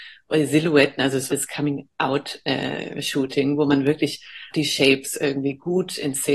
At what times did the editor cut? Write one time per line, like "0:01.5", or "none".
0:01.3
0:04.5